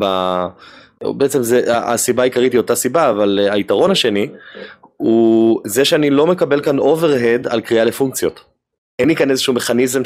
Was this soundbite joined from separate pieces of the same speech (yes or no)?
no